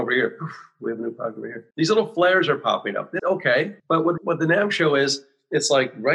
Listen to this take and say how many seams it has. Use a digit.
4